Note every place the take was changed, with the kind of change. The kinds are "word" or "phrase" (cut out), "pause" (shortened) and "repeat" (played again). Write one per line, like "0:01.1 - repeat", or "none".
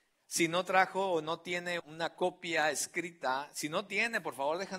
0:01.8 - word